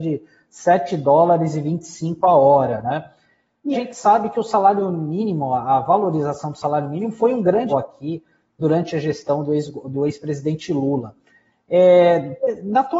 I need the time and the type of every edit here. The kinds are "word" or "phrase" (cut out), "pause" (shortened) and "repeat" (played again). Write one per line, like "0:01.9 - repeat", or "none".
0:03.7 - word
0:07.7 - word

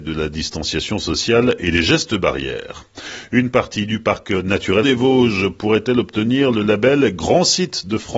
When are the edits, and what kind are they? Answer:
0:04.8 - phrase

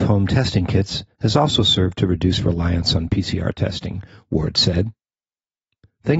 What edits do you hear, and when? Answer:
none

